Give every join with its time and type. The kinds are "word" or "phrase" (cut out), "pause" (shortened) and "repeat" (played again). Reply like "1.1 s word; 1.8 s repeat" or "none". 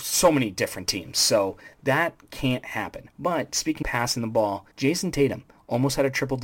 3.1 s pause; 3.8 s word; 4.7 s pause